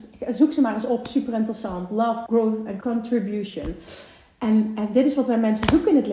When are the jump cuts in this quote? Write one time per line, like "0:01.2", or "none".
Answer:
0:02.3
0:02.8